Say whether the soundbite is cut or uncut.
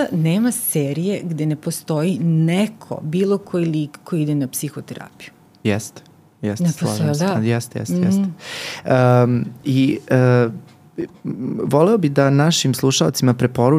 uncut